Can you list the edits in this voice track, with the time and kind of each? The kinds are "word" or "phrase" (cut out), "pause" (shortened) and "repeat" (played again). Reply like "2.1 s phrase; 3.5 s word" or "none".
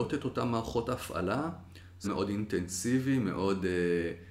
2.0 s word

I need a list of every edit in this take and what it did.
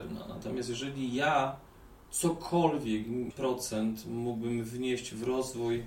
3.3 s phrase

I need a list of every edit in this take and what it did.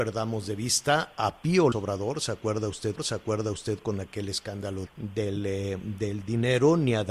1.7 s word; 3.0 s repeat; 4.9 s word

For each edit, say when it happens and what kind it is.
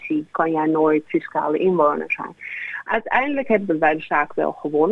none

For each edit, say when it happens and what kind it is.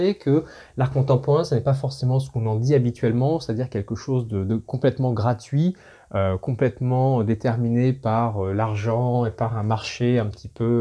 none

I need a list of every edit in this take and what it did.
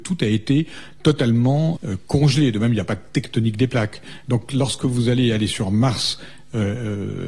1.8 s word

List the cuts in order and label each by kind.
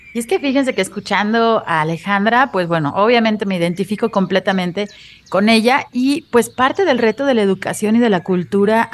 none

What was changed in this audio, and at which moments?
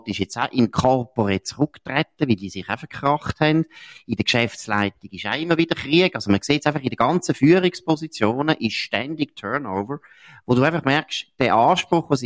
none

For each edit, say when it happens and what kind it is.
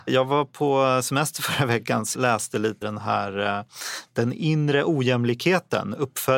2.1 s word; 2.8 s word

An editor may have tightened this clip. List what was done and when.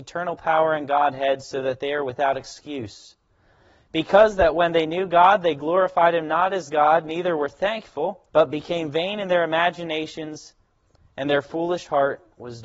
8.3 s pause

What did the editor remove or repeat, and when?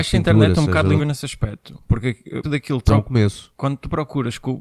1.0 s word; 2.4 s word; 2.9 s word

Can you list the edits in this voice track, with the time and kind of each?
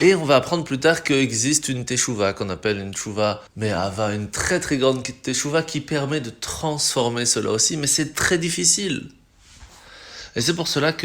3.5 s pause

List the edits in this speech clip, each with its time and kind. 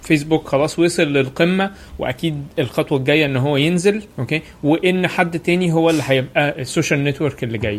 4.1 s pause

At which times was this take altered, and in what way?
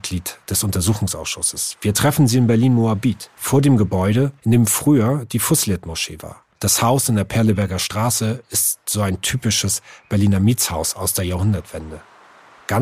3.3 s pause; 4.4 s pause; 6.5 s pause

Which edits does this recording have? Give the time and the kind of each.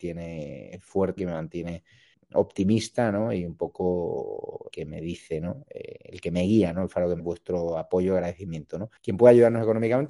1.2 s word; 2.1 s word; 4.7 s word; 7.2 s word; 9.0 s pause

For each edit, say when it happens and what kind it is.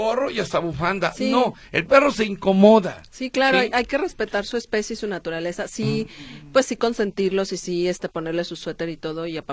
none

